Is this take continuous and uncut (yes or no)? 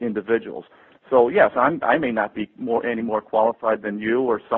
yes